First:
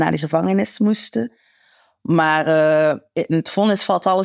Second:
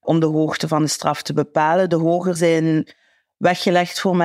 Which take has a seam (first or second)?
second